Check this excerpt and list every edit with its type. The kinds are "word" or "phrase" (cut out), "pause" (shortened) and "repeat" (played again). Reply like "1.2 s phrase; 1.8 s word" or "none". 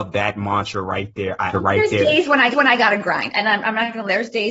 1.5 s phrase; 2.5 s repeat; 3.3 s word

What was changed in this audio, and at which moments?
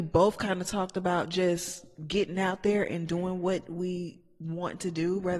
none

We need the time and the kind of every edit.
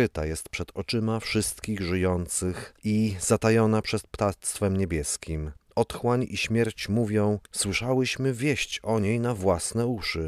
2.8 s pause; 7.4 s pause

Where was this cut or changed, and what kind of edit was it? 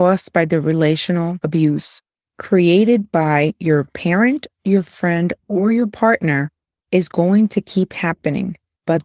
none

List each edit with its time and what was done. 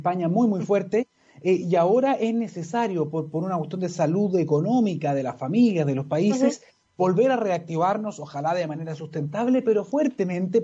none

